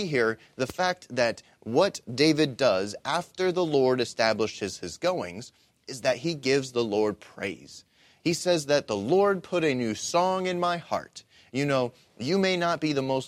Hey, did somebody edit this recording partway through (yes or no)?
no